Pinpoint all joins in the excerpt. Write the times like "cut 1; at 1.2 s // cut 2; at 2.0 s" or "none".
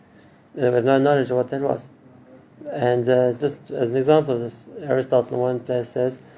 none